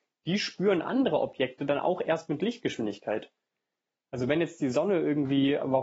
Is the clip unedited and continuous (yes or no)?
yes